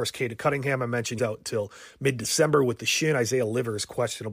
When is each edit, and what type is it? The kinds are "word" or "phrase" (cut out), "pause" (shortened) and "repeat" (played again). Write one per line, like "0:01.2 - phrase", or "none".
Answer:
0:01.2 - word

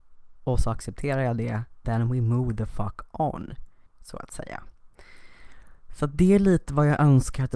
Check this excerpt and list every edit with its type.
0:01.8 - word
0:03.9 - pause

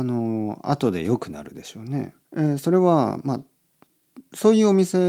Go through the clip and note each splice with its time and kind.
0:02.2 - pause

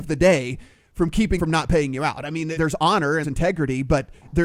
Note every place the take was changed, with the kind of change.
0:01.4 - word
0:02.6 - word
0:03.2 - word

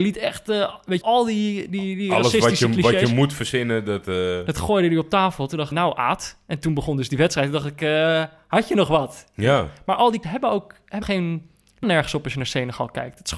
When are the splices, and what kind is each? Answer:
0:01.0 - word
0:05.7 - word
0:10.2 - word
0:11.0 - word
0:11.8 - word

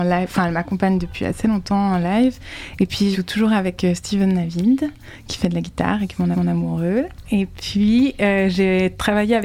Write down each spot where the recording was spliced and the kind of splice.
0:03.1 - word
0:06.3 - repeat

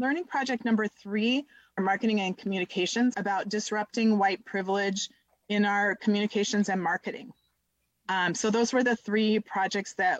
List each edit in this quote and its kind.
0:01.8 - phrase
0:03.1 - phrase

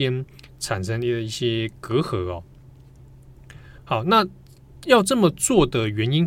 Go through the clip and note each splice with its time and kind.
0:03.8 - pause

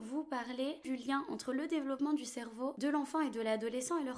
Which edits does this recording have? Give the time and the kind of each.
none

